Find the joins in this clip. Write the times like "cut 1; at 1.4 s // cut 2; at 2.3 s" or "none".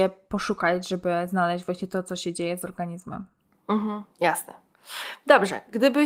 none